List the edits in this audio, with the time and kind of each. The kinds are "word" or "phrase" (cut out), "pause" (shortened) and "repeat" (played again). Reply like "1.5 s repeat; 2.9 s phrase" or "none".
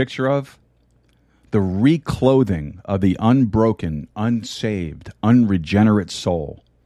none